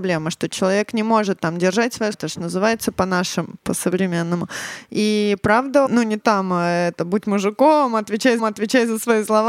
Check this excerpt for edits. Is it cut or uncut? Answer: cut